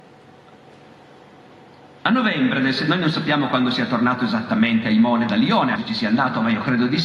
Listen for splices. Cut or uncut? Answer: cut